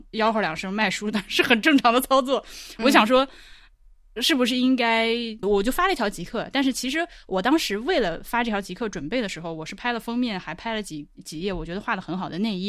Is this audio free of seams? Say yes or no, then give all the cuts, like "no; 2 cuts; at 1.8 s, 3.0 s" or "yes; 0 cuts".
no; 1 cut; at 5.4 s